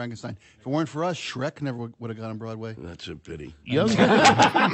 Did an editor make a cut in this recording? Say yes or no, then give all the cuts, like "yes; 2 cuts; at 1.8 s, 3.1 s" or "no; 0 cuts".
no; 0 cuts